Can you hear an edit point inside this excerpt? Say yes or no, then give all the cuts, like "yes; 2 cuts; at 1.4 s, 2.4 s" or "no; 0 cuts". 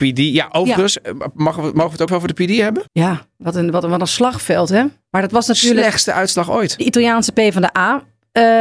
yes; 2 cuts; at 2.1 s, 2.9 s